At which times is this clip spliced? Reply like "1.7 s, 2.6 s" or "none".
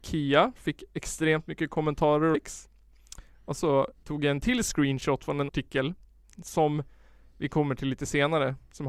2.3 s, 3.6 s, 4.0 s, 5.5 s